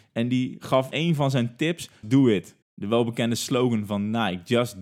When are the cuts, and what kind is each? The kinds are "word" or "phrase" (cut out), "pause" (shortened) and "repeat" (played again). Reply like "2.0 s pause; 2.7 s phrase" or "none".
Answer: 0.9 s word; 2.0 s word; 2.6 s pause